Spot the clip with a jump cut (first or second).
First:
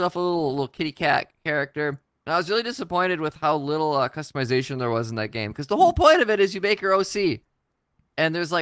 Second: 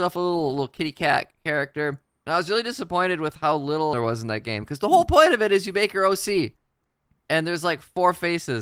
second